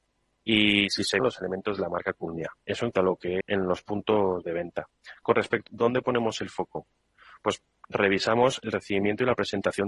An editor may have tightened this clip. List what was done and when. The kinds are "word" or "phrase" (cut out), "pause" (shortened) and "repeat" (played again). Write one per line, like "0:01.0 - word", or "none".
0:01.2 - word
0:02.9 - word
0:03.4 - phrase
0:05.7 - phrase